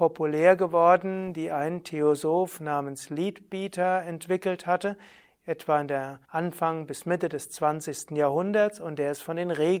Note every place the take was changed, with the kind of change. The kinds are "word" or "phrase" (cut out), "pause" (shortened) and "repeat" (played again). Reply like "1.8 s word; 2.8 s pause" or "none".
6.2 s pause